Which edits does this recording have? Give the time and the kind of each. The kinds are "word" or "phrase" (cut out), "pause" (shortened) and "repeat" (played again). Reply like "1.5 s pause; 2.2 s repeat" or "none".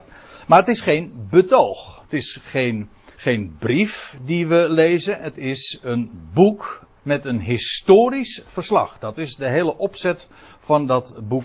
3.1 s pause; 7.0 s pause